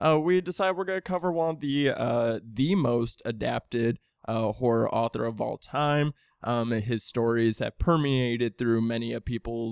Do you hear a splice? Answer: no; 0 cuts

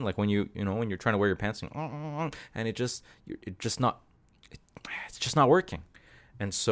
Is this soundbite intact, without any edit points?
yes; 0 cuts

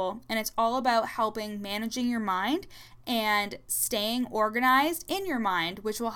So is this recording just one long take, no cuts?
yes; 0 cuts

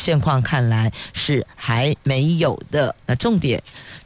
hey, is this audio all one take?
no; 1 cut; at 3.0 s

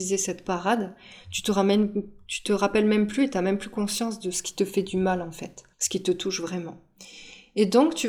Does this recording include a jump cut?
yes; 1 cut; at 5.7 s

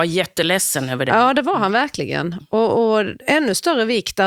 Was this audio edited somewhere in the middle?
no; 0 cuts

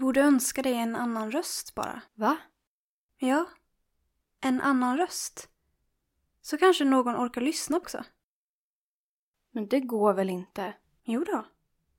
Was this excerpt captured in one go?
no; 2 cuts; at 2.1 s, 7.8 s

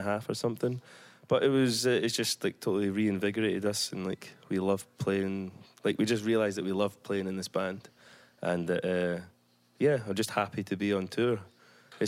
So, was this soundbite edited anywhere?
no; 0 cuts

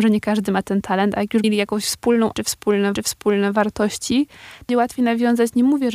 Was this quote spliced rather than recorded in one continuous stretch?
yes; 4 cuts; at 1.4 s, 2.3 s, 2.9 s, 4.7 s

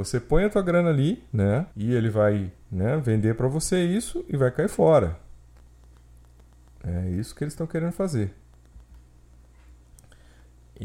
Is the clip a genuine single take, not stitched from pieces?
no; 1 cut; at 1.7 s

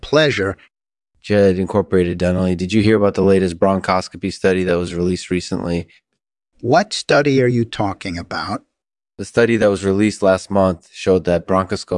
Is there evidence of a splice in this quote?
no; 0 cuts

